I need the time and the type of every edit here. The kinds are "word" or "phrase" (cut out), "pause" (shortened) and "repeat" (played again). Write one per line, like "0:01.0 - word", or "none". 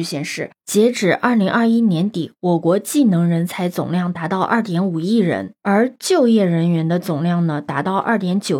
0:05.6 - pause